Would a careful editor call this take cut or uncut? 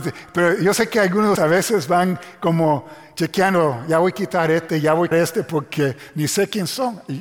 cut